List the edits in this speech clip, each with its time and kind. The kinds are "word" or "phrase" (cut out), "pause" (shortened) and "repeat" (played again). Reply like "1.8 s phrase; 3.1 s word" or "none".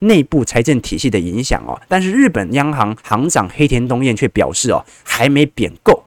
3.0 s pause